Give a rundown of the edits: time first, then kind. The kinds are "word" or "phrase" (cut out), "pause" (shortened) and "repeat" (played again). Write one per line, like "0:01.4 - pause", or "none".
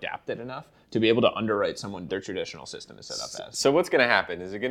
0:02.1 - phrase